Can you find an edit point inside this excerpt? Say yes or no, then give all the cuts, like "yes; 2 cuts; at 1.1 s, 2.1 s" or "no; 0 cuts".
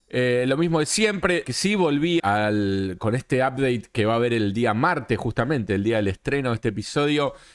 yes; 2 cuts; at 1.4 s, 2.2 s